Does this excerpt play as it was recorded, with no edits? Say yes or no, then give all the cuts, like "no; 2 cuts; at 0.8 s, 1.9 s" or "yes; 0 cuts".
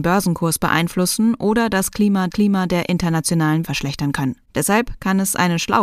no; 3 cuts; at 2.3 s, 3.6 s, 4.4 s